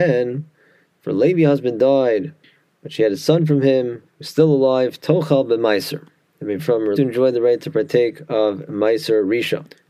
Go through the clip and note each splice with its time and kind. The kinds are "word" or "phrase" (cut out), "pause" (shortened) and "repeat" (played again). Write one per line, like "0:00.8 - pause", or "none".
0:04.1 - pause
0:06.6 - phrase
0:07.0 - phrase